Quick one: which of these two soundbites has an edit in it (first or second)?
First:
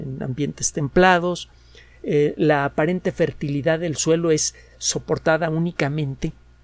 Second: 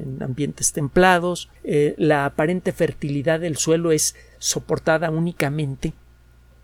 second